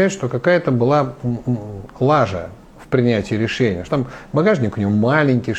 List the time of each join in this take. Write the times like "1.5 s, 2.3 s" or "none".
3.9 s